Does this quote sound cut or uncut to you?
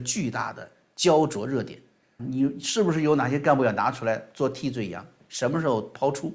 cut